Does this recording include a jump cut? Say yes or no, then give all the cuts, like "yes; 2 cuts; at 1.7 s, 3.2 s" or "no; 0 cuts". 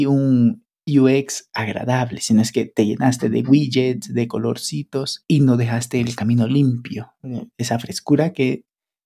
no; 0 cuts